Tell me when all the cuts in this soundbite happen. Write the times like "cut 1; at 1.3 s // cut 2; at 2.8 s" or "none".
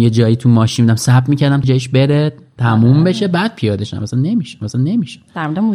cut 1; at 1.6 s // cut 2; at 4.6 s